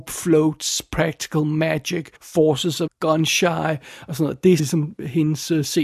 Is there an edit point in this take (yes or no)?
yes